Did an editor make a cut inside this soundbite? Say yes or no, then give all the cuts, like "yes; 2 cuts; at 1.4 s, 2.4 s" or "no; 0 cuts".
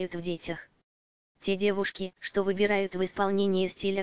yes; 1 cut; at 2.2 s